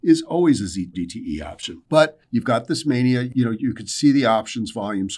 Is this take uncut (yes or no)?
no